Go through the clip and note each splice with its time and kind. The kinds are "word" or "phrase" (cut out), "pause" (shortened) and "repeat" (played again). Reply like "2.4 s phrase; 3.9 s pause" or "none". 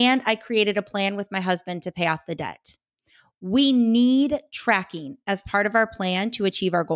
none